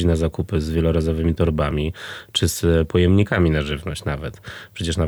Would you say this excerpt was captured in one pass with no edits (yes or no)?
yes